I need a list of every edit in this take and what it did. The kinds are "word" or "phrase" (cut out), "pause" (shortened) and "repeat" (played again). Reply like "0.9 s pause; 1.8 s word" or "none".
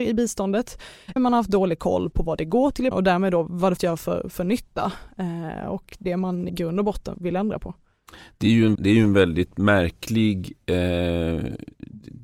1.2 s word; 2.1 s word; 2.9 s word; 3.8 s word; 6.0 s word; 6.5 s word; 7.1 s word; 8.8 s word